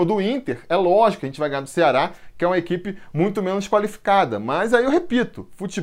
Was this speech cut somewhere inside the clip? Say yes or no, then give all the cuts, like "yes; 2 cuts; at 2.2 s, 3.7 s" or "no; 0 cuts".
no; 0 cuts